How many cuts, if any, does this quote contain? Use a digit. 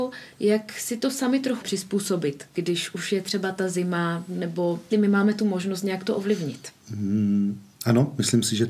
3